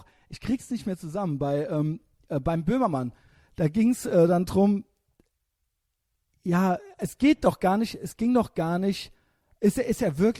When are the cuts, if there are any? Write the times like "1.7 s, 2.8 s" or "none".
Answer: none